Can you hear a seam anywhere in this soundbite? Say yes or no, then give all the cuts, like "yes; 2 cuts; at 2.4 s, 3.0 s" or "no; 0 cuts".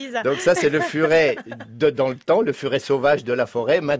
no; 0 cuts